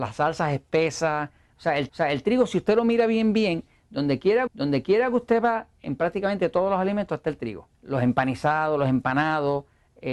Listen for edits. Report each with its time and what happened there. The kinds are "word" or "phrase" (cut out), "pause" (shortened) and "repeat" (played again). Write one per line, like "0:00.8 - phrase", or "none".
0:01.9 - repeat
0:04.5 - repeat
0:07.7 - pause